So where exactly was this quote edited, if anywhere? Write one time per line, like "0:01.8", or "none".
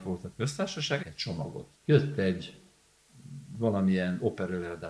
0:01.0
0:01.7